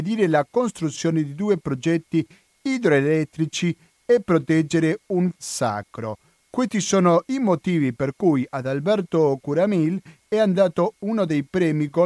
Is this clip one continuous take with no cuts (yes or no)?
no